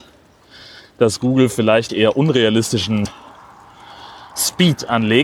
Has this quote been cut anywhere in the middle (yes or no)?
yes